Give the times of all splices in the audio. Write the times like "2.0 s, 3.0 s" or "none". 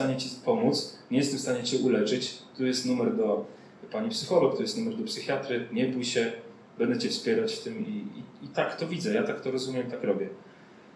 none